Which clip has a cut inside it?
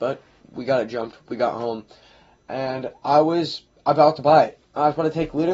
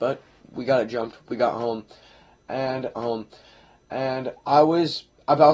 second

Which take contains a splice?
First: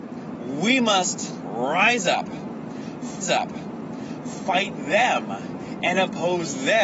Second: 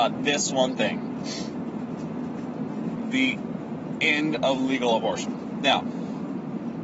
first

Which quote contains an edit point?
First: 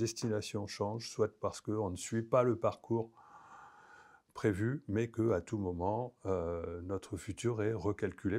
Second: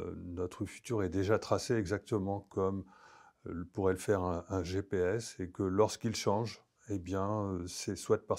second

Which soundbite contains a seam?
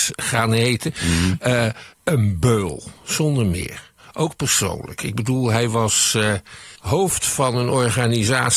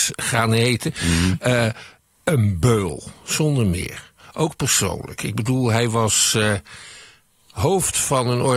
first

